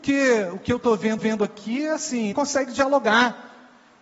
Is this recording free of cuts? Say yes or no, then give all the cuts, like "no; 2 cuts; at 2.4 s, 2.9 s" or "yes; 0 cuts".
no; 2 cuts; at 1.2 s, 2.3 s